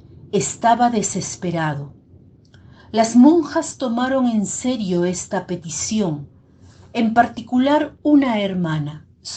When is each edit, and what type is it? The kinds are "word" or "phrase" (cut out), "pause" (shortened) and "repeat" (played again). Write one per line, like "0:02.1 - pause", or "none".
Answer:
none